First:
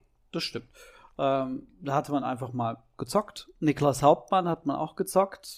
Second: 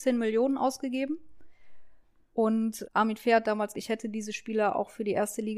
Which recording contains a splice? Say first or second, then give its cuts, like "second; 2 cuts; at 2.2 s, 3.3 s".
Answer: second; 2 cuts; at 2.8 s, 3.7 s